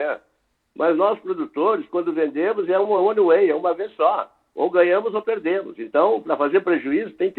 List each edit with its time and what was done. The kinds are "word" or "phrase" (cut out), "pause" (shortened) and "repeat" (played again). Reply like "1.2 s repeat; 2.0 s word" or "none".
none